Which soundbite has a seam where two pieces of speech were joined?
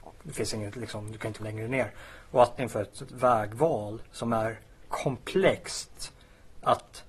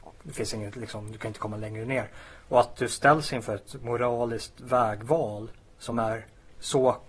first; 5 cuts; at 1.4 s, 2.6 s, 3.1 s, 4.1 s, 4.9 s

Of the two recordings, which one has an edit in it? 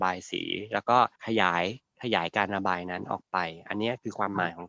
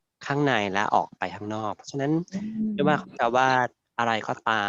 first; 1 cut; at 1.2 s

